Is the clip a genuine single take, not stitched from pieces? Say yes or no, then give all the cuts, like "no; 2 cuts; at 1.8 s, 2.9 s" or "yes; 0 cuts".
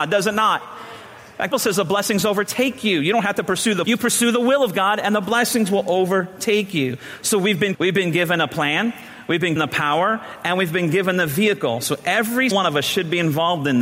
no; 5 cuts; at 1.5 s, 3.8 s, 7.7 s, 9.6 s, 12.5 s